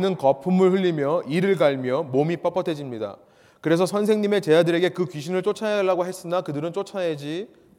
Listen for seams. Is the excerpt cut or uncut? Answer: uncut